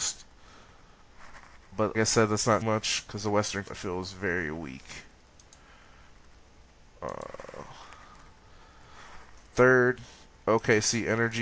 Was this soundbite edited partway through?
yes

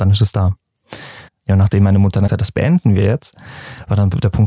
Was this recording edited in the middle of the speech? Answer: yes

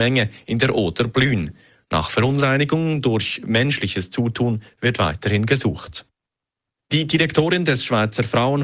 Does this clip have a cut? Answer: no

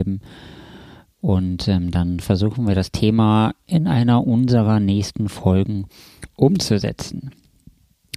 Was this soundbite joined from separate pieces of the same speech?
no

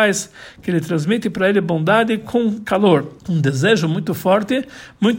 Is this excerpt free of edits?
no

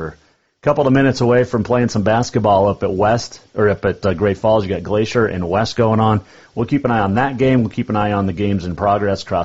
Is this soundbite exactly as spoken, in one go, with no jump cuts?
yes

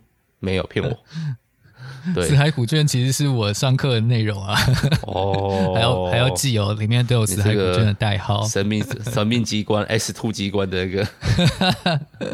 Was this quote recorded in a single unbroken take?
yes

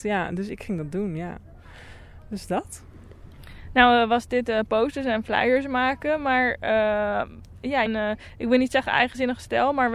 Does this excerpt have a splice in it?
yes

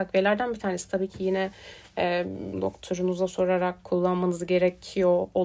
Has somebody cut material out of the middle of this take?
yes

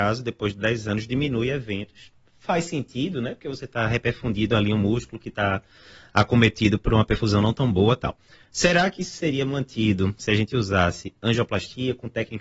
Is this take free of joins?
yes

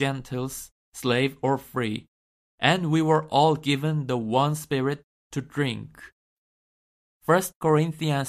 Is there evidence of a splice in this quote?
no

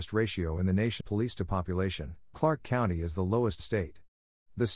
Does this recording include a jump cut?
yes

